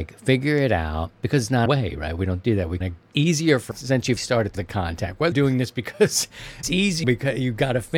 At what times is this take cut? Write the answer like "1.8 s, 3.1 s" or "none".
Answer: 1.7 s, 2.8 s, 3.1 s, 3.7 s, 4.2 s, 4.5 s, 5.3 s, 6.6 s, 7.0 s